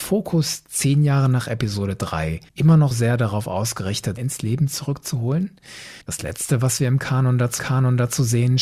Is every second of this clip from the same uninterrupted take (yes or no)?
no